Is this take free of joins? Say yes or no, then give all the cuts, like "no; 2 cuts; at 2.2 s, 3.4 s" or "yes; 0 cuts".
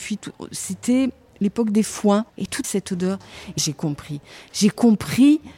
no; 3 cuts; at 2.3 s, 2.6 s, 3.6 s